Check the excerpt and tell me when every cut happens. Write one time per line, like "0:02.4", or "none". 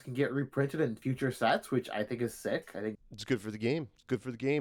0:02.9